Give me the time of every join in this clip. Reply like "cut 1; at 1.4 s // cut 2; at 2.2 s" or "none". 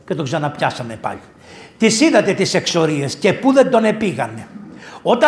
none

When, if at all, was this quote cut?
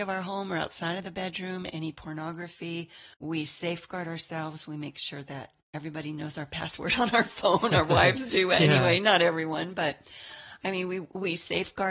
cut 1; at 3.1 s // cut 2; at 5.6 s

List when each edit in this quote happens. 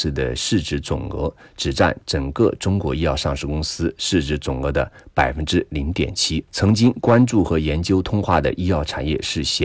cut 1; at 6.5 s

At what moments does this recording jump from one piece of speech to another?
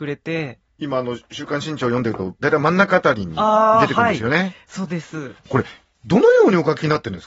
cut 1; at 5.4 s

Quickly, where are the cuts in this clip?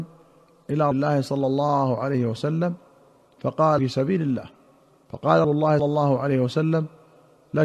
cut 1; at 0.9 s // cut 2; at 3.8 s // cut 3; at 5.4 s // cut 4; at 5.8 s

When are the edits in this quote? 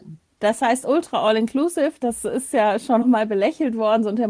cut 1; at 3.0 s

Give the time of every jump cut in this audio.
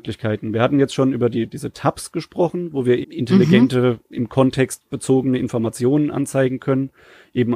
cut 1; at 3.0 s

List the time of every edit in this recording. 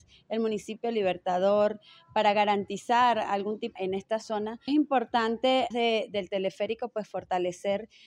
cut 1; at 3.8 s // cut 2; at 4.7 s // cut 3; at 5.7 s

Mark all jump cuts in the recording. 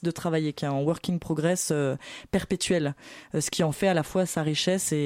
none

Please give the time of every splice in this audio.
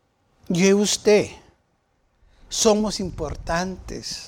none

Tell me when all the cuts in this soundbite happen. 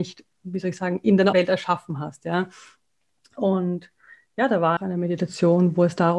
cut 1; at 1.3 s // cut 2; at 4.8 s

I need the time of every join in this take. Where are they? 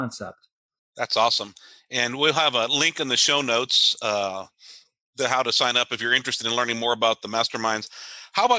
none

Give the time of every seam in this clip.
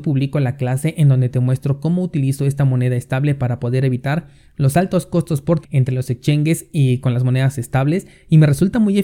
cut 1; at 5.6 s

